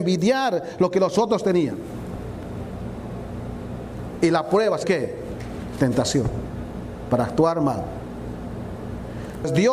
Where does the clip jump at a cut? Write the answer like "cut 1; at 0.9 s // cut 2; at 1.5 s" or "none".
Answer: cut 1; at 4.8 s